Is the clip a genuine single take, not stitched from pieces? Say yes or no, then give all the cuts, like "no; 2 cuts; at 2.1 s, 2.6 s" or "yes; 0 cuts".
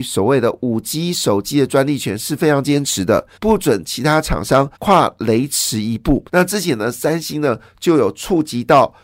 no; 3 cuts; at 3.4 s, 4.8 s, 6.3 s